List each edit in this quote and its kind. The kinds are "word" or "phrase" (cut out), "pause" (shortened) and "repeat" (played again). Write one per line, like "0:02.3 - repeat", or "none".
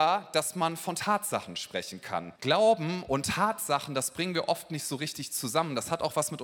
0:02.4 - pause